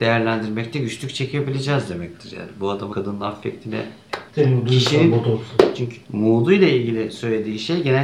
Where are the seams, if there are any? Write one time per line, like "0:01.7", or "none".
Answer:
0:02.9
0:04.3
0:06.0